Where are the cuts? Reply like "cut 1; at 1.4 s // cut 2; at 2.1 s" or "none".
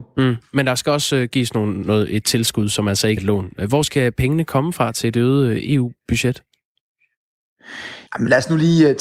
cut 1; at 3.2 s // cut 2; at 8.1 s